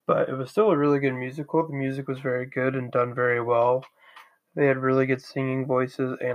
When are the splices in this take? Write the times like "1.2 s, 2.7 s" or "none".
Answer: none